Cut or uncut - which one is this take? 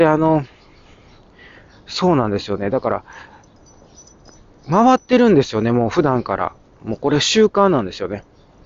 uncut